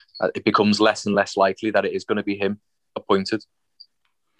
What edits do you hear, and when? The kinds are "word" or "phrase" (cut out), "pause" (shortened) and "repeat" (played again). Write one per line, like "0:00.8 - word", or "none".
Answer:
none